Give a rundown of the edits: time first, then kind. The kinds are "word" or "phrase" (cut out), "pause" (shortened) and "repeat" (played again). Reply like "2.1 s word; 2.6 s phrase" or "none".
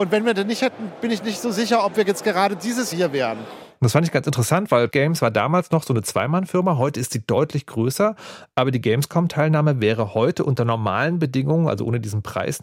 2.9 s word; 4.9 s word